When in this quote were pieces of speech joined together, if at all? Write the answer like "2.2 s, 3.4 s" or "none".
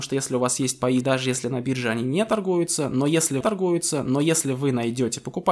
1.0 s, 3.4 s